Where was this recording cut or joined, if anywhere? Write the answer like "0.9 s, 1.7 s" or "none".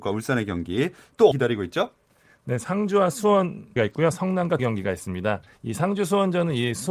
1.3 s, 2.1 s, 3.8 s, 4.6 s